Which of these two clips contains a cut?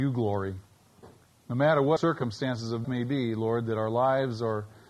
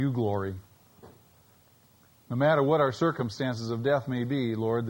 first; 3 cuts; at 1.2 s, 2.0 s, 2.8 s

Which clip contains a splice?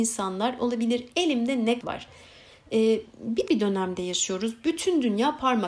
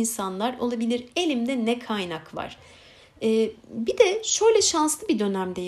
first; 2 cuts; at 1.8 s, 3.5 s

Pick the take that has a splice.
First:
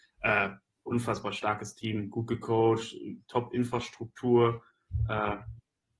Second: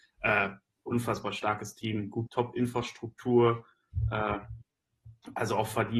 second; 1 cut; at 2.3 s

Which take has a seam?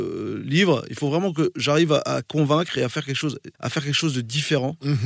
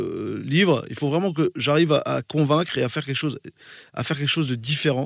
first; 1 cut; at 3.5 s

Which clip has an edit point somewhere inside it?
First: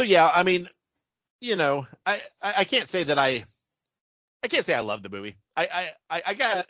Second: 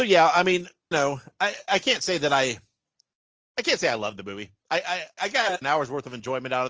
second; 4 cuts; at 0.9 s, 1.7 s, 5.2 s, 5.6 s

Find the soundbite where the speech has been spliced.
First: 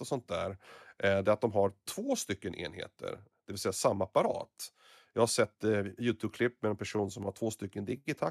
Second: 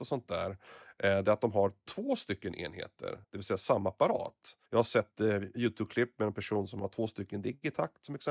second; 2 cuts; at 3.2 s, 4.7 s

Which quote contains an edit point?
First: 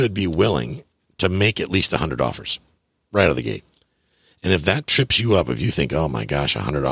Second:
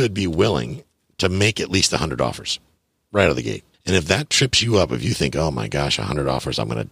second; 1 cut; at 3.7 s

